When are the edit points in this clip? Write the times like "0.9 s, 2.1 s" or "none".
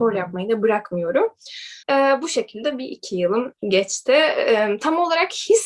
1.8 s, 3.6 s